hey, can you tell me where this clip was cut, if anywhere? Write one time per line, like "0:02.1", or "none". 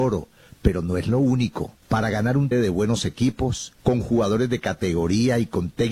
0:01.8
0:02.5
0:03.8